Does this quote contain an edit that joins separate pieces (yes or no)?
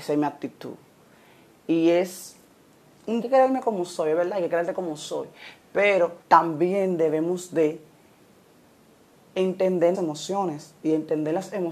yes